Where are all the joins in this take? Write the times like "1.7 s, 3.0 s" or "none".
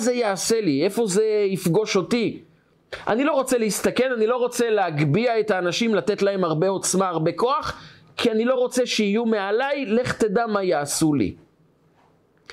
none